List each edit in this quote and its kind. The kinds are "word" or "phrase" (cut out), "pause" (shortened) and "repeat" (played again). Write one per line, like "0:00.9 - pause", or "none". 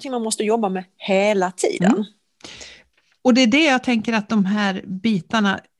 0:02.9 - pause